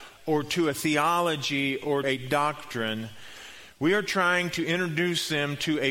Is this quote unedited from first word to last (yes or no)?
no